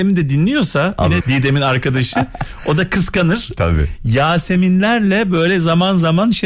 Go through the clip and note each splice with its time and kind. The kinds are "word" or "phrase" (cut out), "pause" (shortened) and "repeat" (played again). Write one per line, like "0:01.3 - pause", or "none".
0:01.2 - word

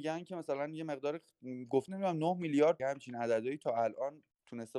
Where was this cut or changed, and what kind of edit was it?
0:01.9 - word
0:02.8 - word

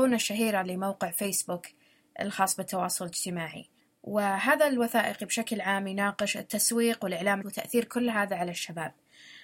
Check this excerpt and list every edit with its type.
0:03.8 - pause
0:07.4 - word

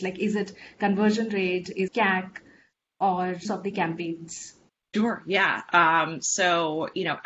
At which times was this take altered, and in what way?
0:01.9 - word
0:03.4 - phrase
0:04.7 - pause

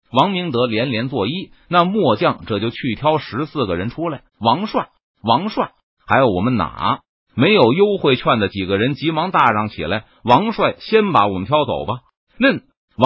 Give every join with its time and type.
0:04.3 - pause

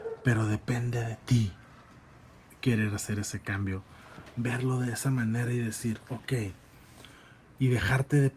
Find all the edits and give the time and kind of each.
none

